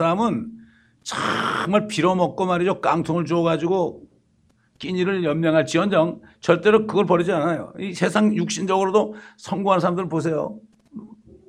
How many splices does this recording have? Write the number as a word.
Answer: zero